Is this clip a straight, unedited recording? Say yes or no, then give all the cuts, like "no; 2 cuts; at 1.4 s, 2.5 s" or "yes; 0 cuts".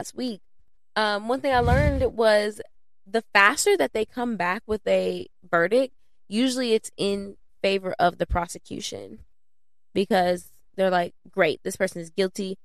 yes; 0 cuts